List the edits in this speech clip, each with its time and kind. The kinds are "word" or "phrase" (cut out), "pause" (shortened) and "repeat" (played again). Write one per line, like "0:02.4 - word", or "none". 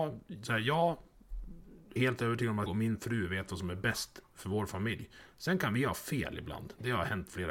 0:02.0 - word
0:02.7 - word